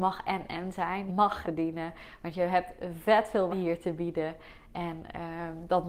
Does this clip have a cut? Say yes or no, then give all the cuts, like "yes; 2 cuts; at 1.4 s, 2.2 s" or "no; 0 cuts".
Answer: yes; 3 cuts; at 1.1 s, 1.4 s, 3.5 s